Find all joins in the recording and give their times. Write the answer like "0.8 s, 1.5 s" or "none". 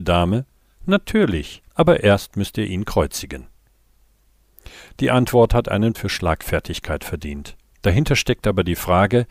1.7 s, 5.9 s, 7.6 s

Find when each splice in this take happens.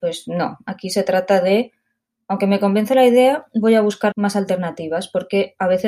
4.1 s

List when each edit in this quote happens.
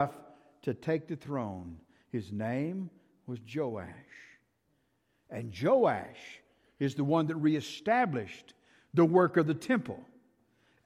none

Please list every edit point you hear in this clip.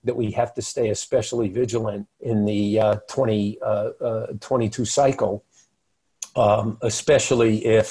2.1 s

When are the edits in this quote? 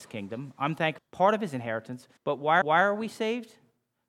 1.0 s, 2.2 s, 2.6 s

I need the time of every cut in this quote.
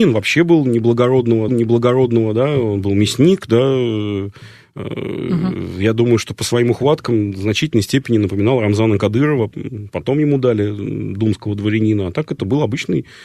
1.5 s

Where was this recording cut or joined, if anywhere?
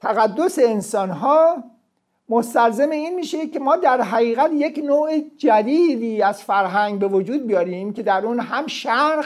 none

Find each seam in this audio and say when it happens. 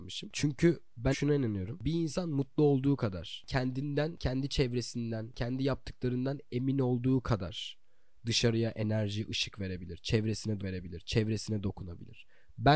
1.1 s, 10.6 s

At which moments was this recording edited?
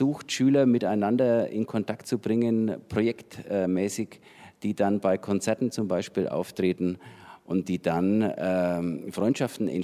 none

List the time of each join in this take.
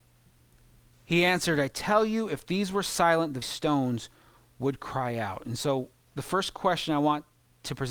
3.4 s

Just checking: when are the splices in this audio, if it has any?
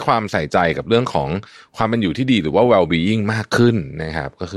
none

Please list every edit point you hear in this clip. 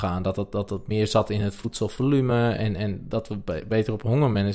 none

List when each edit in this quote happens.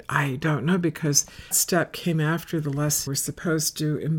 1.5 s, 3.1 s

